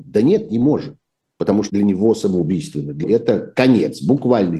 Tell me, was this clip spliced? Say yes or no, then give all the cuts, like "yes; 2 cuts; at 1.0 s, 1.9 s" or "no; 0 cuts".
yes; 2 cuts; at 1.7 s, 3.0 s